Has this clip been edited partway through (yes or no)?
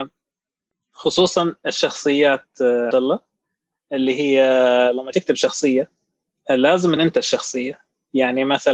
yes